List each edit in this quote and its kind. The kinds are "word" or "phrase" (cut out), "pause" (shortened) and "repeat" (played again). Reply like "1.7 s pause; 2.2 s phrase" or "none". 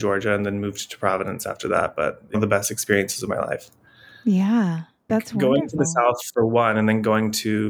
2.3 s phrase; 5.1 s word